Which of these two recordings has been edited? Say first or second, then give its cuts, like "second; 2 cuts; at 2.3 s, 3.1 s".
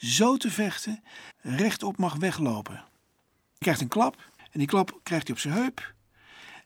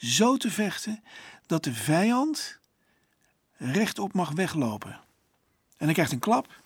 first; 3 cuts; at 1.3 s, 3.6 s, 4.4 s